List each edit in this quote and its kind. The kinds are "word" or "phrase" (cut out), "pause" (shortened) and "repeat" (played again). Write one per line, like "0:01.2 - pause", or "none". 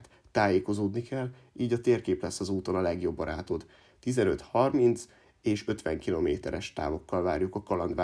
none